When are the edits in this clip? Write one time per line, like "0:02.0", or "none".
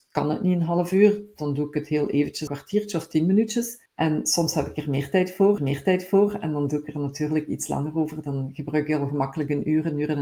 0:02.5
0:03.9
0:05.6